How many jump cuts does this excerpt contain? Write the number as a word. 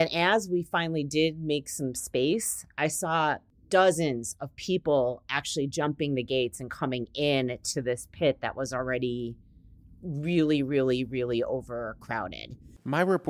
zero